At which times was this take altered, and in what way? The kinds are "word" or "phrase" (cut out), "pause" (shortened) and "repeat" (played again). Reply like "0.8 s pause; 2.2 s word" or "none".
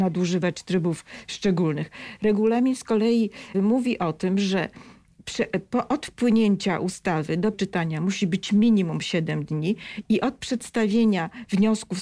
3.5 s word; 7.5 s word